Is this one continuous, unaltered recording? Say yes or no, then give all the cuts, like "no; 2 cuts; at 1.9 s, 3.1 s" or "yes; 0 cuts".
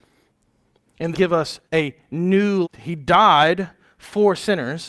no; 3 cuts; at 1.1 s, 1.7 s, 2.6 s